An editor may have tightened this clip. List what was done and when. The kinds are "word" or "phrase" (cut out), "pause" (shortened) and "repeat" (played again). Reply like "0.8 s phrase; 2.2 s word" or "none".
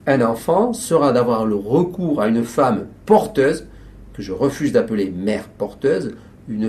none